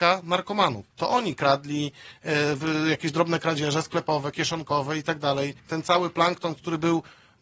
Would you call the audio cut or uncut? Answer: cut